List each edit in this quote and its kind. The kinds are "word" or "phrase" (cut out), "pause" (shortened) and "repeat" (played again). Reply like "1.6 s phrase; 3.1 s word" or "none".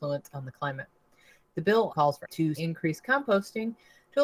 1.9 s word; 2.2 s word; 2.6 s word